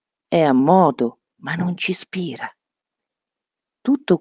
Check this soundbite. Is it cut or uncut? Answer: uncut